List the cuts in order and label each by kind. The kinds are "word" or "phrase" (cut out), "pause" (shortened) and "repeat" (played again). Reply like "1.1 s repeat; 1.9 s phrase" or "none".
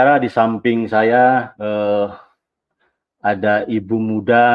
1.5 s word